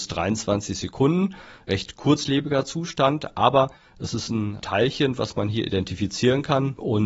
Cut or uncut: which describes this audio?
uncut